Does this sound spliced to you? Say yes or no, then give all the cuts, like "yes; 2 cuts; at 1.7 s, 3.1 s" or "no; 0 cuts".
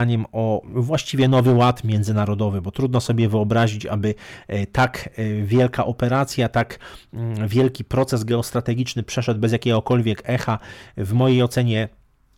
no; 0 cuts